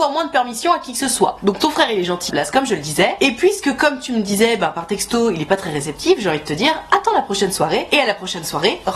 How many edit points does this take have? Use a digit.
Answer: 1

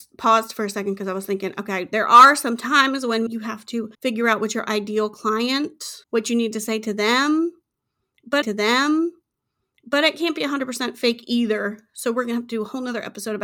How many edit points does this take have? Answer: 4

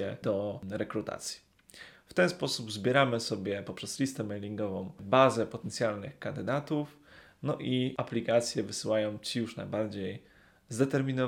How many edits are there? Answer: 0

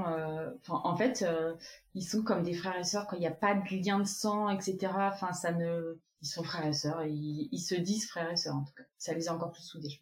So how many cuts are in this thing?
1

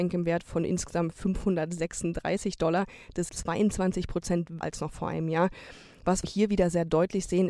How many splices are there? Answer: 3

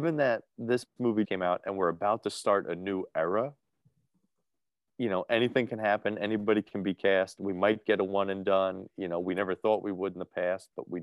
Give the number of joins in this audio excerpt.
1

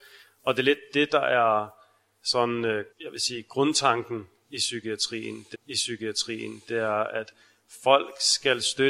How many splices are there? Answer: 2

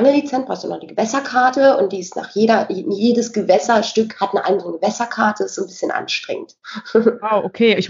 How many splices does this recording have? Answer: 0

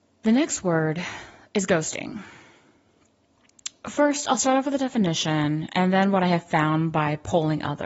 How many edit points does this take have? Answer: 0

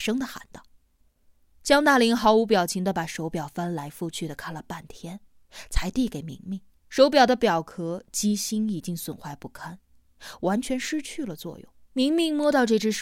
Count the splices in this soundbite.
2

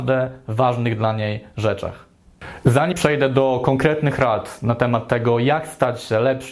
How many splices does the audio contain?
1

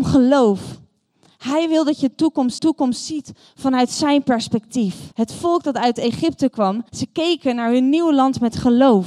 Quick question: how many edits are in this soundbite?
3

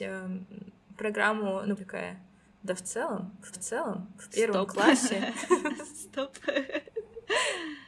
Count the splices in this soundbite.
2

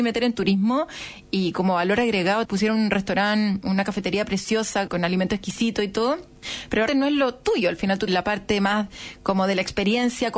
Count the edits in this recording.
2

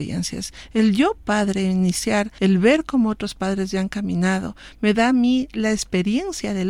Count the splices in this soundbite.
0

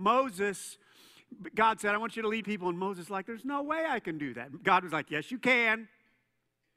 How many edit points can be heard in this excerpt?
1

